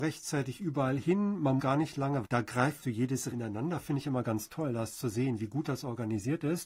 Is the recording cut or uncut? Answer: cut